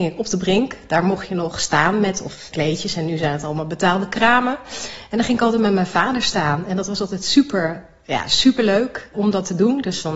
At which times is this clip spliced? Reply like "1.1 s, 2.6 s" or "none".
2.5 s, 9.1 s